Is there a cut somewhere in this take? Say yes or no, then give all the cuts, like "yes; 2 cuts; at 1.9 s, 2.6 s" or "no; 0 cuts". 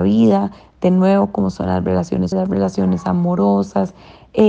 yes; 1 cut; at 2.3 s